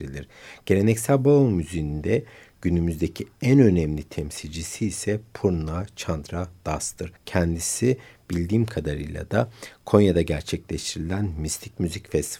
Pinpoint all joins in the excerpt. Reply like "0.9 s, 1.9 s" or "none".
7.2 s